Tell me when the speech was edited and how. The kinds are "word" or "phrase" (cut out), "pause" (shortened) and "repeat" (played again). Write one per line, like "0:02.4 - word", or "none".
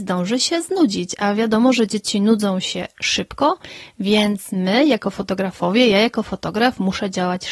none